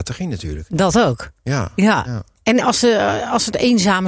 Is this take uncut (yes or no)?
no